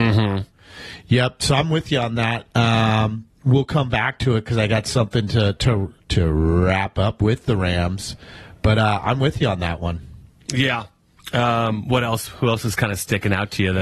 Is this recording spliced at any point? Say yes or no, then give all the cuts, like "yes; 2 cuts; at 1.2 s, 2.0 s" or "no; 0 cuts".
no; 0 cuts